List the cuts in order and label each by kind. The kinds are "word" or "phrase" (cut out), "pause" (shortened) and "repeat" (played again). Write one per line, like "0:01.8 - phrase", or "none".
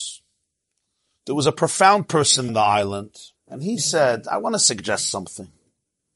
0:02.5 - word
0:03.4 - pause